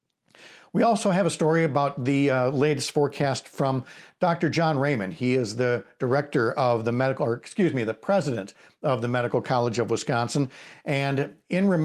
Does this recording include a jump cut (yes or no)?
no